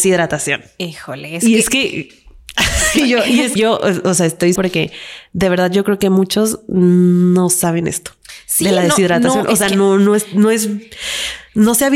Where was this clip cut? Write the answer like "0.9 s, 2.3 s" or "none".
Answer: 3.6 s, 4.6 s